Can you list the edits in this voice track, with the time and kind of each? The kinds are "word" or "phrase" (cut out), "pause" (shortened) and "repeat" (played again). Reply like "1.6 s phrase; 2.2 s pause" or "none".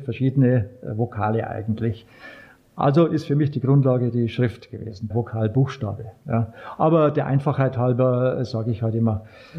5.1 s word